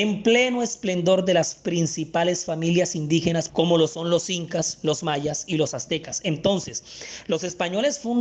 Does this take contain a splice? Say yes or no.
yes